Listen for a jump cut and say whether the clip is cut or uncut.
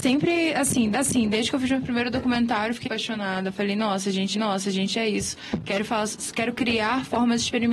cut